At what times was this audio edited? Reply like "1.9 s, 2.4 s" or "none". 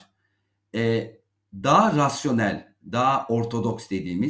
none